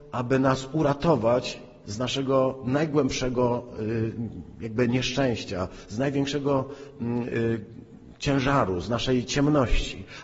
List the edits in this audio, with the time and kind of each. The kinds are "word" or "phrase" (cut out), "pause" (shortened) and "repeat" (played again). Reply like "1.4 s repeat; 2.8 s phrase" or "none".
none